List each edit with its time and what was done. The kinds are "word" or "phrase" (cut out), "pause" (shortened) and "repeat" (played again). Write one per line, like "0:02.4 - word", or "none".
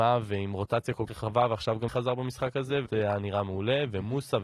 0:01.1 - word
0:01.9 - word
0:02.9 - word